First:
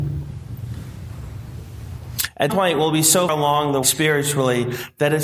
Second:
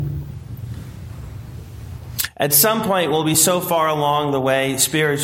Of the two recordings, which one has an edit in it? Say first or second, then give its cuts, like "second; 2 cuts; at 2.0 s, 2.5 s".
first; 3 cuts; at 2.5 s, 3.3 s, 3.8 s